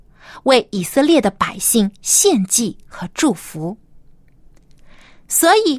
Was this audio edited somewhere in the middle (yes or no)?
no